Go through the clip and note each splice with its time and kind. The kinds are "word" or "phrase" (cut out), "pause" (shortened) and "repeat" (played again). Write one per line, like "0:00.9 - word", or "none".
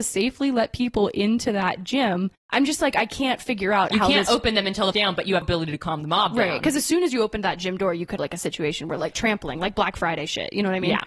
0:02.4 - pause
0:04.9 - phrase
0:05.4 - word
0:08.2 - word
0:09.1 - word